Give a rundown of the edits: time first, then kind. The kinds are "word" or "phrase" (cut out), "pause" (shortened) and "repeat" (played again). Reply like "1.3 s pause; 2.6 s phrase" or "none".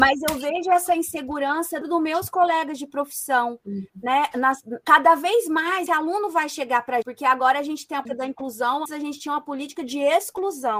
1.8 s word; 4.8 s word; 5.9 s word; 7.0 s word; 8.1 s word; 8.9 s word